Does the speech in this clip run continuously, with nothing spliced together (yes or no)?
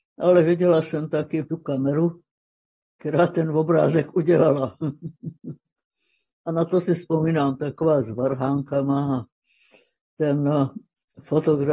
yes